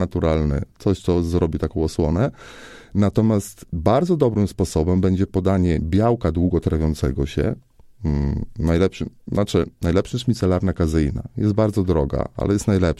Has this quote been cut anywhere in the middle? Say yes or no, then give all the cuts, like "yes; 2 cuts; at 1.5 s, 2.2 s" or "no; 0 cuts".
no; 0 cuts